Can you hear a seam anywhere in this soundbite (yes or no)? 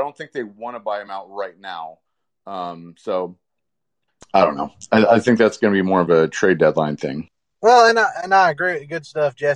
no